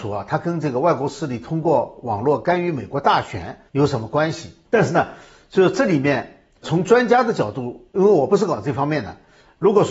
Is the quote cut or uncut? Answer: cut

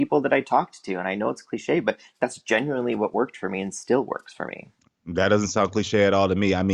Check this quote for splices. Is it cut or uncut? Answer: uncut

